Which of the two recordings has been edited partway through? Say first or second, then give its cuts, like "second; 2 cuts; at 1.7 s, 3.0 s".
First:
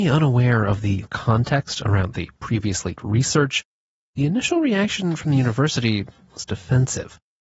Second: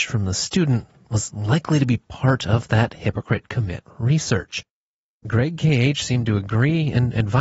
first; 2 cuts; at 1.0 s, 3.0 s